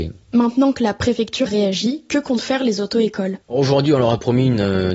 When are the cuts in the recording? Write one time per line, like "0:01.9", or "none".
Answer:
0:01.5
0:03.4